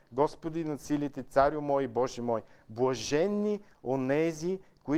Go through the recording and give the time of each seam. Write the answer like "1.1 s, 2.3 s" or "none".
none